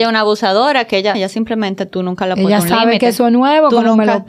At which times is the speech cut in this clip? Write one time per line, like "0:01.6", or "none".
0:01.1